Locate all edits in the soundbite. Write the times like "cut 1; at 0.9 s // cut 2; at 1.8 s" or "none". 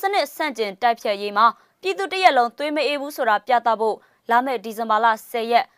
none